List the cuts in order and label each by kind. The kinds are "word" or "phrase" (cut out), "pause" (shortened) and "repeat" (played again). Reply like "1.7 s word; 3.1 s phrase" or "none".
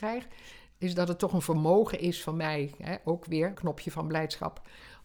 3.5 s word

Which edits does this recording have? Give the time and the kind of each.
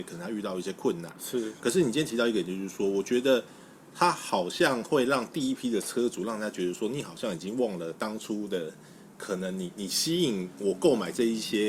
none

